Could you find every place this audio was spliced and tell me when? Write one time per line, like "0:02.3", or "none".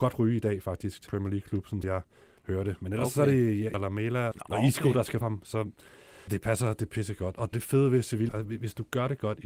0:01.1
0:01.8
0:03.7
0:04.3
0:05.2
0:06.3
0:06.9
0:07.5
0:08.3